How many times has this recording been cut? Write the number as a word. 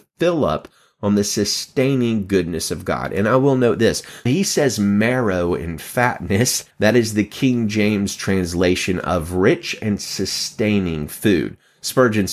two